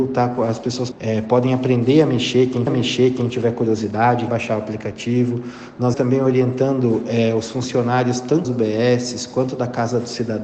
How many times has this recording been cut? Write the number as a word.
five